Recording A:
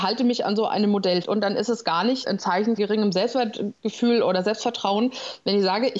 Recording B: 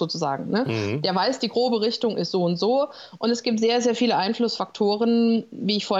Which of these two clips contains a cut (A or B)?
A